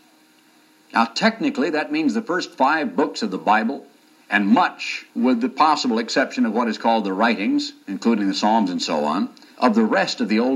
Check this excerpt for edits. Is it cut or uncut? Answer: cut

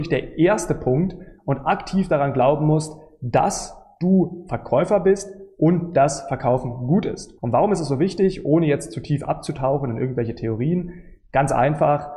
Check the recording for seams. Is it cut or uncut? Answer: cut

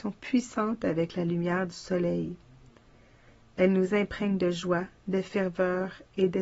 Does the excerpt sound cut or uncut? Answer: uncut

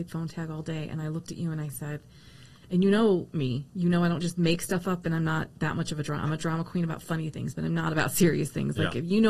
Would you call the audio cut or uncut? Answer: uncut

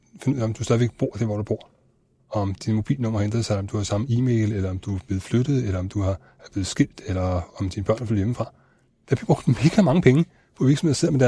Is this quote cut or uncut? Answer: uncut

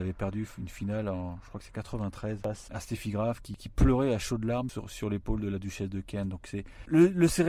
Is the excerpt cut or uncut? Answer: cut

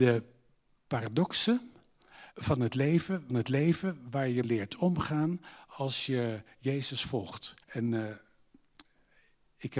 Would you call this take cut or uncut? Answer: cut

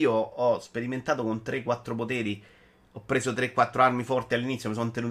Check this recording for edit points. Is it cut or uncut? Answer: uncut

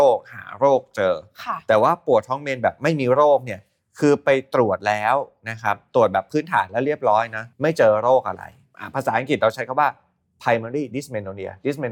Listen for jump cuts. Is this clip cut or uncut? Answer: uncut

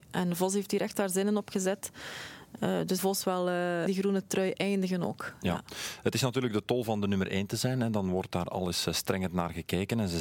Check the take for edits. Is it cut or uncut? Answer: cut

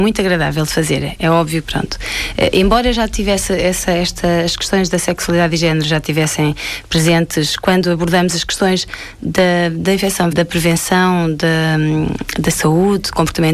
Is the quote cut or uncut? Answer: cut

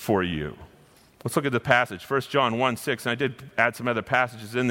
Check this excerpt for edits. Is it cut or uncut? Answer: uncut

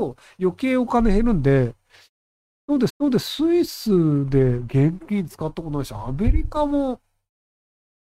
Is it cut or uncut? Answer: cut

